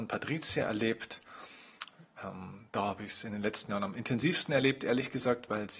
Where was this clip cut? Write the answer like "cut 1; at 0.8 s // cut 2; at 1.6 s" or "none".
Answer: none